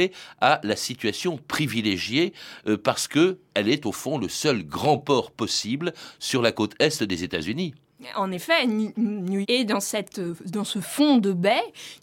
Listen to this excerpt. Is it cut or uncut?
cut